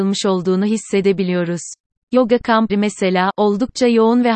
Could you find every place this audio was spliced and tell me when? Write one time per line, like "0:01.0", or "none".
0:01.9
0:02.7